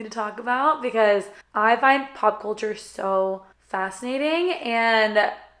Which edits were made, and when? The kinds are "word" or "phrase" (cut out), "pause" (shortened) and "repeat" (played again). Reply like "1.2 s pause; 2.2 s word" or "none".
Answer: 1.4 s pause; 3.5 s pause